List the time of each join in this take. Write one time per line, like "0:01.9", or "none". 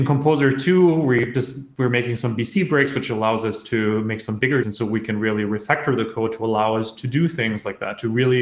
0:04.6